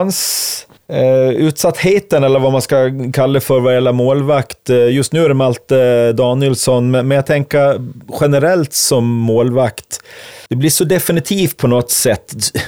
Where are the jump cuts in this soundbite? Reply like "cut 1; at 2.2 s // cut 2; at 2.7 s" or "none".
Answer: cut 1; at 10.5 s